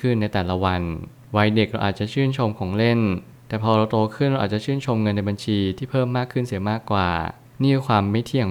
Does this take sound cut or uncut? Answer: uncut